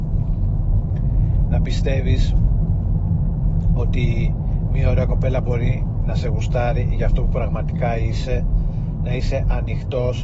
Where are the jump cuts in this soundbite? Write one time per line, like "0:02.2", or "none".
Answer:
none